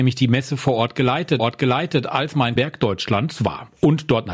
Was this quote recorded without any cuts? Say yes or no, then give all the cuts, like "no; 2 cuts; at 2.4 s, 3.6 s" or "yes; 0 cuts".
no; 2 cuts; at 1.4 s, 2.6 s